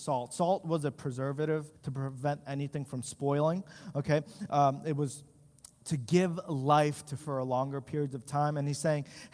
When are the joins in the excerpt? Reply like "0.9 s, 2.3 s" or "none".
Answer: 1.8 s, 7.2 s